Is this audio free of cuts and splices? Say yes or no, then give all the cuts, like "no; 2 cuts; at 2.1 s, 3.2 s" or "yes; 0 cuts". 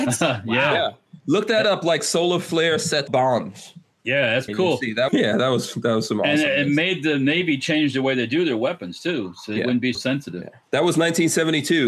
no; 4 cuts; at 3.1 s, 4.5 s, 5.1 s, 9.9 s